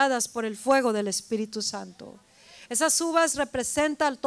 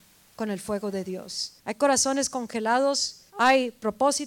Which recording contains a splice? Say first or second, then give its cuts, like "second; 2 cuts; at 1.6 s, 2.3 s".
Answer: second; 2 cuts; at 1.6 s, 3.3 s